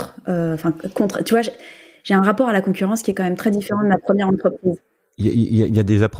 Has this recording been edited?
no; 0 cuts

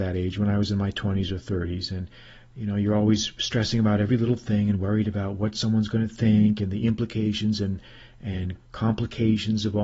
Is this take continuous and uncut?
yes; 0 cuts

